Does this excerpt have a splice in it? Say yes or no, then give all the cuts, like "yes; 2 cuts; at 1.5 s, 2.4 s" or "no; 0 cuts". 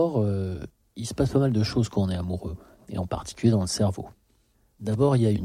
no; 0 cuts